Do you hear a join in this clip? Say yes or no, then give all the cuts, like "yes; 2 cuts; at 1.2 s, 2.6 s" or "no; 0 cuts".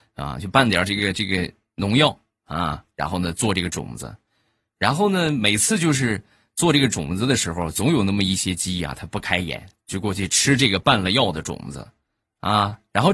no; 0 cuts